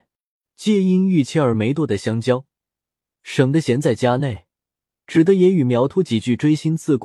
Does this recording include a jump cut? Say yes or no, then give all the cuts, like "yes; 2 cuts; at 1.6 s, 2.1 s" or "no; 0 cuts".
no; 0 cuts